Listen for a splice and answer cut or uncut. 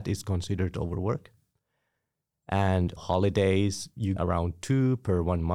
cut